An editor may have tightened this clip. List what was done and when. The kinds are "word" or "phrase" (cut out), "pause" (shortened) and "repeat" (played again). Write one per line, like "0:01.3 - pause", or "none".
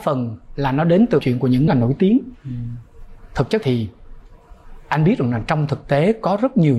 0:01.2 - word
0:01.7 - phrase
0:03.6 - word

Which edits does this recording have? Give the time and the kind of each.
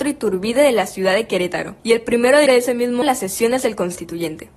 0:01.8 - pause
0:02.5 - word
0:03.0 - phrase

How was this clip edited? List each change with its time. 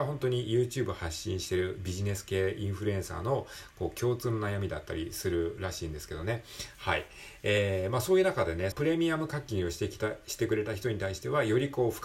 0:08.7 - phrase

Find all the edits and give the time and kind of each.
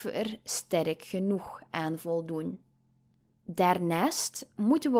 none

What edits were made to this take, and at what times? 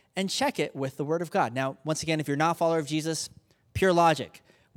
none

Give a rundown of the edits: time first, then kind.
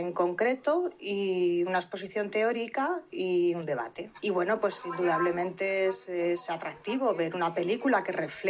0:04.2 - pause

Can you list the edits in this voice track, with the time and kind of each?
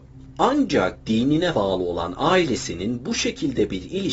0:01.5 - word

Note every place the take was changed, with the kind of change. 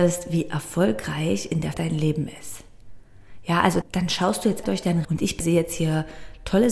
0:01.7 - word
0:03.8 - word
0:04.6 - word
0:05.0 - word
0:05.4 - word

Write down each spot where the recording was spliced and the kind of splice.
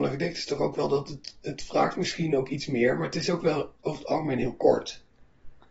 0:03.8 - pause

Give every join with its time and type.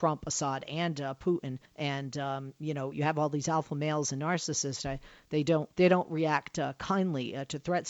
0:01.7 - pause
0:05.7 - pause

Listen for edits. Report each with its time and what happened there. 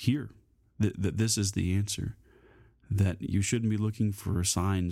none

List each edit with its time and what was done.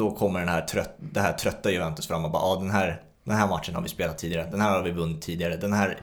none

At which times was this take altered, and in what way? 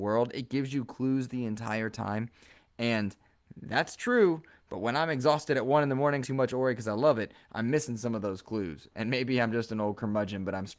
0:06.2 - phrase

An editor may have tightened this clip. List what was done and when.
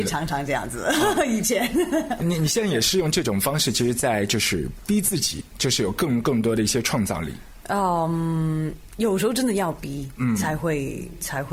none

